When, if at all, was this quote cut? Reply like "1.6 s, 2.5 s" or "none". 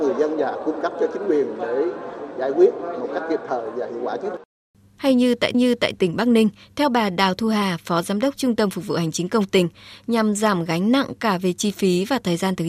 5.5 s